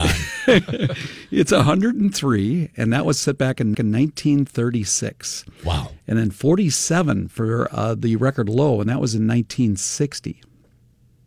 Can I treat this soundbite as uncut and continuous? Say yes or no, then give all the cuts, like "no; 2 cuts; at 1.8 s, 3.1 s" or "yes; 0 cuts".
no; 1 cut; at 3.7 s